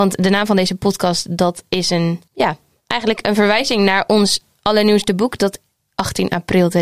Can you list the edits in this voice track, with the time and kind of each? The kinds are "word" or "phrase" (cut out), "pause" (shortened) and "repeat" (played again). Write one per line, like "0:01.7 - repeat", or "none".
0:02.3 - pause